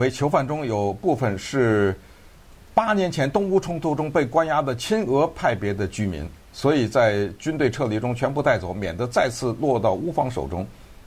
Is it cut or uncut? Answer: uncut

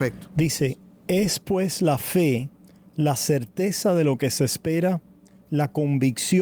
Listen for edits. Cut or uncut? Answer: uncut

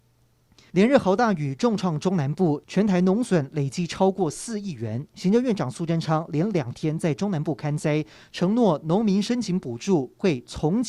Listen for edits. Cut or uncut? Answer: uncut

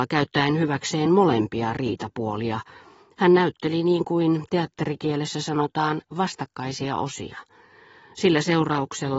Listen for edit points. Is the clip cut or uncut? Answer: uncut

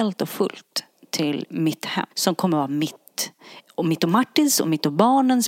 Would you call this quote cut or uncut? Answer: cut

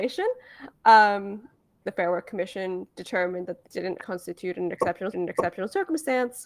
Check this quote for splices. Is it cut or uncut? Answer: cut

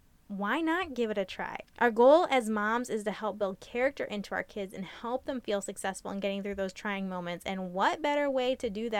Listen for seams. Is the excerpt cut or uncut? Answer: uncut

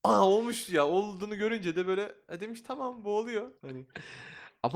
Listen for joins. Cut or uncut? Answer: cut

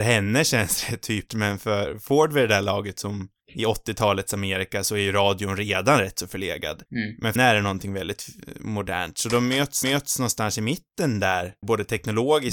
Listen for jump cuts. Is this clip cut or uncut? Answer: cut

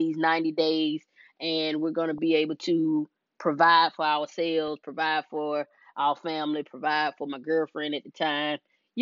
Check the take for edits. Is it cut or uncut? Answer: uncut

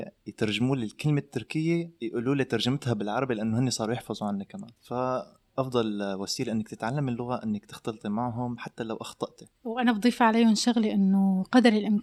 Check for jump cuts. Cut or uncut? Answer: cut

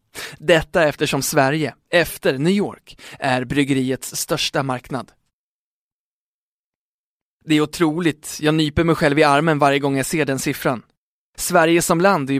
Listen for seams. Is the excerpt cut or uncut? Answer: uncut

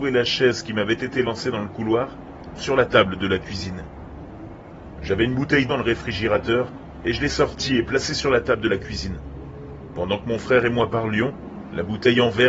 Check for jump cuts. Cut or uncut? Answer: cut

